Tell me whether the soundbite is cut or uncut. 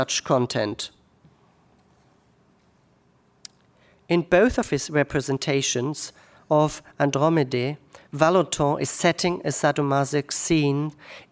uncut